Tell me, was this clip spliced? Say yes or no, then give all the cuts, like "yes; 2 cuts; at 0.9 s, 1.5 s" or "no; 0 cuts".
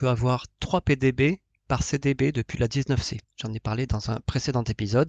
yes; 1 cut; at 3.2 s